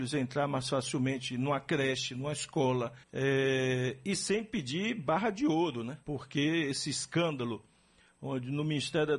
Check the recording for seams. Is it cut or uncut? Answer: cut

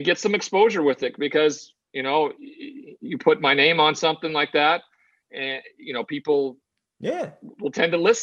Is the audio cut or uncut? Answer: uncut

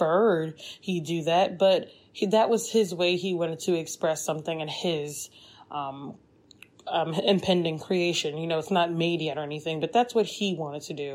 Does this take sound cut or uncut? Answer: uncut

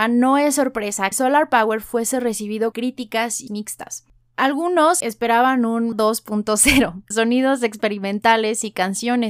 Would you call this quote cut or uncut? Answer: cut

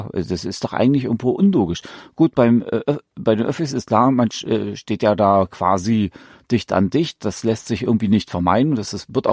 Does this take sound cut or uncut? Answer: uncut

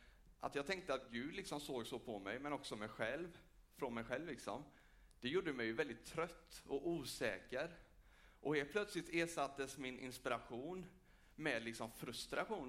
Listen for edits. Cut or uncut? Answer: uncut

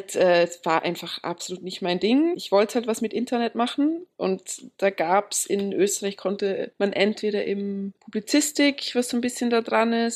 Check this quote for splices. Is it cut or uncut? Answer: uncut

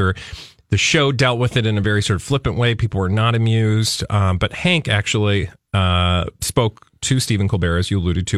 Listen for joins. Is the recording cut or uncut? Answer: uncut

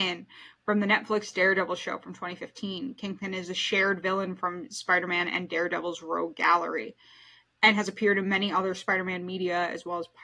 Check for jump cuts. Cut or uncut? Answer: uncut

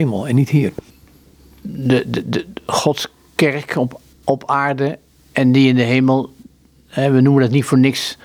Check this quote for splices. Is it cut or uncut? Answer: uncut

